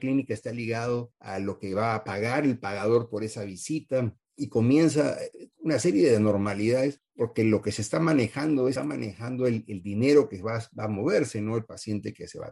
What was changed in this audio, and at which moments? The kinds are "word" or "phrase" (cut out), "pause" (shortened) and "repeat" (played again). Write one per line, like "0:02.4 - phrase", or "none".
0:08.8 - word